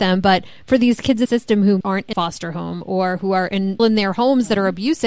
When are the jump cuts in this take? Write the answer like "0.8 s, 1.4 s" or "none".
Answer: 1.3 s, 1.8 s, 2.1 s, 3.8 s